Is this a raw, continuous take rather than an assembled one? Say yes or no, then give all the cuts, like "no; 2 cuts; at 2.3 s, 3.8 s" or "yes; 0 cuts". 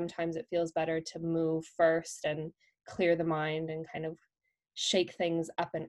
yes; 0 cuts